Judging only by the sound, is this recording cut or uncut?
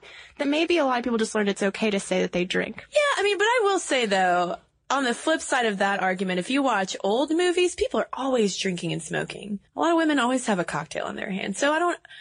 cut